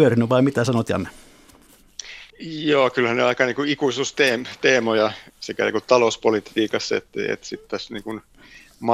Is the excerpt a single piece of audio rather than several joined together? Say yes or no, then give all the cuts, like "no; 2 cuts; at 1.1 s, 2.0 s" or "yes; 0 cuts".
no; 1 cut; at 2.3 s